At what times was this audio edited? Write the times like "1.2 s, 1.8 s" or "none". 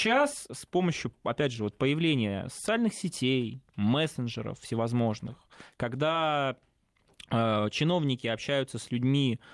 none